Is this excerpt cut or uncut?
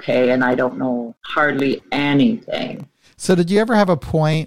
cut